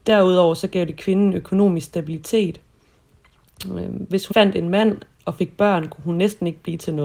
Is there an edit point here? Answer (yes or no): yes